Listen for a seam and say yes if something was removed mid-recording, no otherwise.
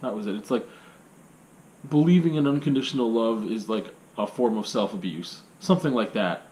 no